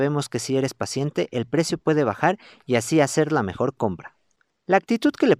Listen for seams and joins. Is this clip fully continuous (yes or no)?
yes